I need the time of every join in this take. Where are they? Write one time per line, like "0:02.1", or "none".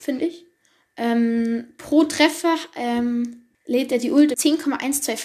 0:03.5
0:04.3

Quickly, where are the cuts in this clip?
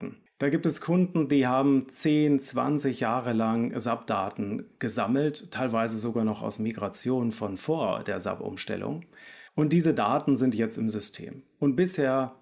0:09.5

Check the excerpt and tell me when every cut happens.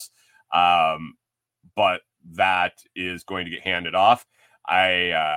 none

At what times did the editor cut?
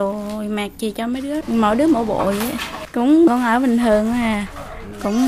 0:01.4
0:03.3

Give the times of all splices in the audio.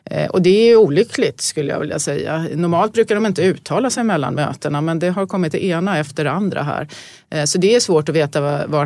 none

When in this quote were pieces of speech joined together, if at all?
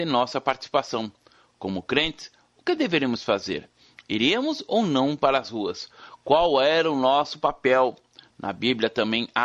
none

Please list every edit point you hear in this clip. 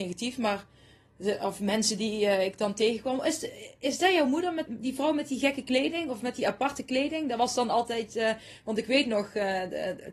0:04.7

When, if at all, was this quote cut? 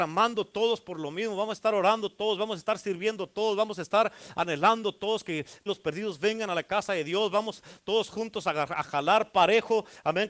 0:05.7

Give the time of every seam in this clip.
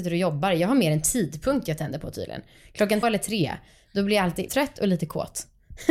0:03.0
0:04.5

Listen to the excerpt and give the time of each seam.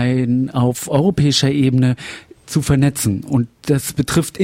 none

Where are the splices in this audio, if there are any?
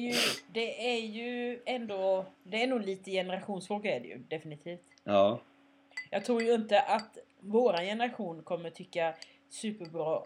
0:02.3

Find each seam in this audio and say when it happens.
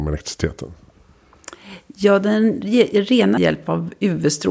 0:03.4

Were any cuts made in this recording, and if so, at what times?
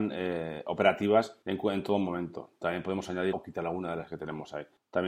0:01.4
0:03.3

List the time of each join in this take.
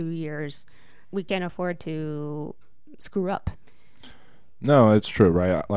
none

